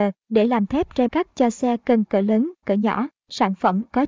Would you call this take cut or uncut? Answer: cut